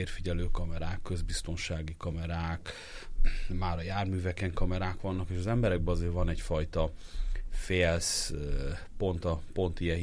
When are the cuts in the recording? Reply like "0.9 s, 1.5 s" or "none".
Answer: none